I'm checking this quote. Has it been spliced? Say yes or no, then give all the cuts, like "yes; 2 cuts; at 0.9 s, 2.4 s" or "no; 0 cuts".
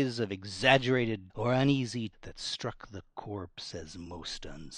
yes; 2 cuts; at 1.3 s, 2.1 s